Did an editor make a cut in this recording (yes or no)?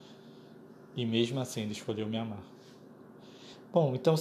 no